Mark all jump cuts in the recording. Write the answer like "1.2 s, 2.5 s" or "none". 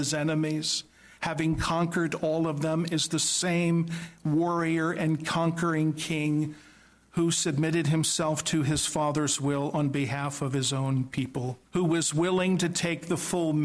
11.7 s